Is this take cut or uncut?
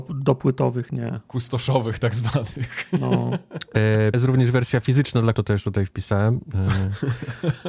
cut